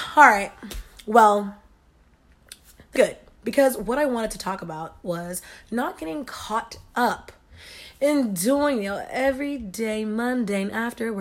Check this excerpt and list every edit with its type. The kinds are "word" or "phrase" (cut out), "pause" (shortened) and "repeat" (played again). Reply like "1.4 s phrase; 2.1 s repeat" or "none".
3.0 s word